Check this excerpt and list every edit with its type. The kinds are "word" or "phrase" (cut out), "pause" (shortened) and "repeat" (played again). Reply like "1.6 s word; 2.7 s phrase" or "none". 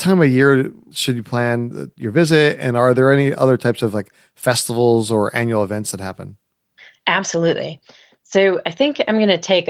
none